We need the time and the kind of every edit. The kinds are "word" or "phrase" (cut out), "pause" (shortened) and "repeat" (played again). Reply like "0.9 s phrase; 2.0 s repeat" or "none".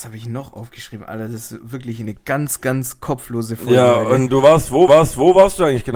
4.9 s repeat